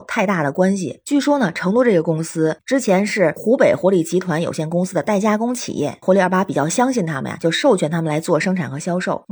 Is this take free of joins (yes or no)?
no